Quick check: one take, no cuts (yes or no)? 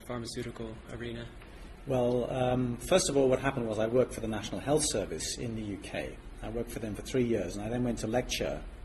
yes